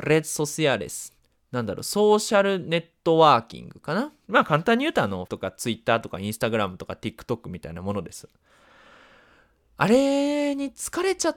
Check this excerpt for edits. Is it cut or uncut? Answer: cut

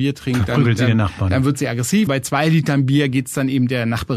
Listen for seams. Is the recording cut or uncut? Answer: cut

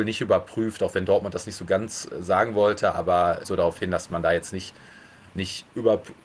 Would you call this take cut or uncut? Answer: cut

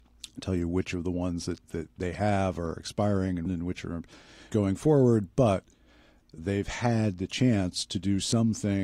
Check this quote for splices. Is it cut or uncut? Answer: cut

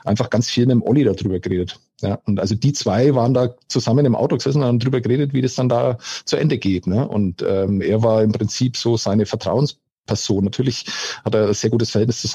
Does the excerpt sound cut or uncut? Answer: uncut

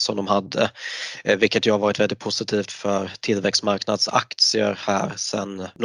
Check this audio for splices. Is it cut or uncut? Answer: uncut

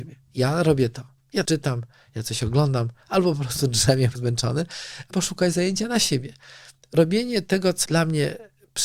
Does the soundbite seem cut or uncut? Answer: cut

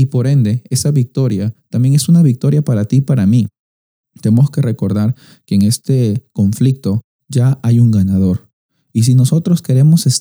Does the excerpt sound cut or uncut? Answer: uncut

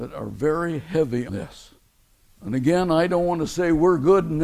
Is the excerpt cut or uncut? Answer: cut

